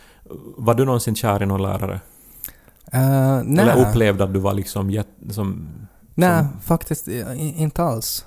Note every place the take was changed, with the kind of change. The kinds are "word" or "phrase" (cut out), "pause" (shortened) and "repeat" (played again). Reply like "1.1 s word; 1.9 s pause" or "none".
none